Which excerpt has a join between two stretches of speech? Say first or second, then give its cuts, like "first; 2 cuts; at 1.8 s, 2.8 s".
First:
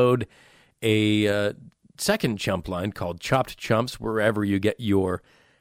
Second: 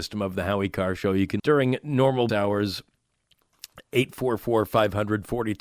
second; 2 cuts; at 1.4 s, 2.3 s